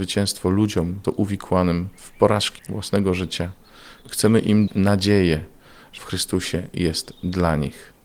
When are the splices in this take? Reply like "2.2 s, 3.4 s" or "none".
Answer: 1.0 s, 2.6 s, 4.7 s, 6.0 s